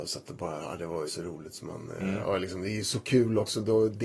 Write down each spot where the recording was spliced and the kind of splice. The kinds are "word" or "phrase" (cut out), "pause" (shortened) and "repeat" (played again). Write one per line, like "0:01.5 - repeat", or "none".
0:01.1 - word

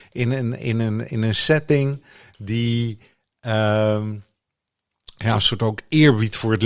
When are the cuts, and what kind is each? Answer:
none

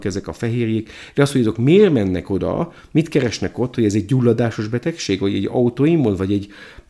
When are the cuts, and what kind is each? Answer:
none

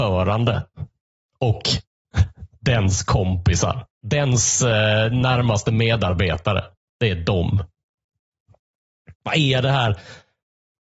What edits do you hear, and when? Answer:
0:03.9 - pause

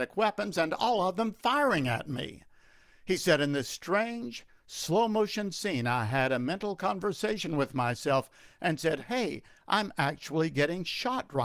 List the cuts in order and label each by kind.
none

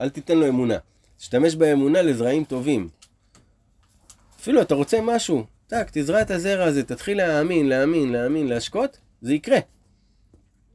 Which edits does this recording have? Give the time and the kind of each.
none

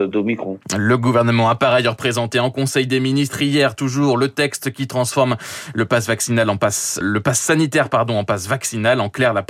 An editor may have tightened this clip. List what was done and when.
0:07.0 - word

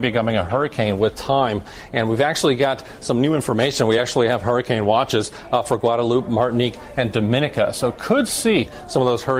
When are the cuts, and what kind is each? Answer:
none

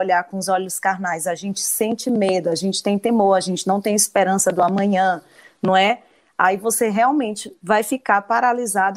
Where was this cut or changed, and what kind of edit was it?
none

